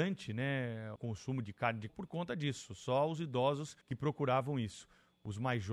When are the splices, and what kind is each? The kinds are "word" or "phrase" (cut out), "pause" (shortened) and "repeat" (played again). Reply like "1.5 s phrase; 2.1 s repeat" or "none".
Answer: 1.0 s word; 1.4 s word; 1.9 s word; 3.8 s pause